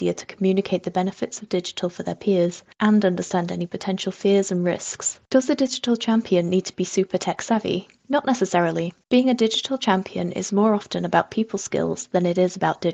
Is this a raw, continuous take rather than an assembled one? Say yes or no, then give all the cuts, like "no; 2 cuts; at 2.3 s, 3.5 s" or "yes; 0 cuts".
no; 4 cuts; at 2.7 s, 5.2 s, 8.0 s, 9.0 s